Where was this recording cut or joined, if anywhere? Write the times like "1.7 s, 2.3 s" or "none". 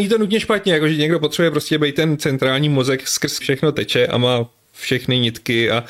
3.4 s